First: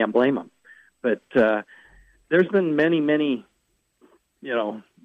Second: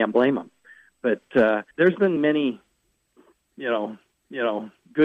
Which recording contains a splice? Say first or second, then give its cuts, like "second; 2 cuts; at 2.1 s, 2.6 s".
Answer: second; 3 cuts; at 1.7 s, 2.2 s, 4.1 s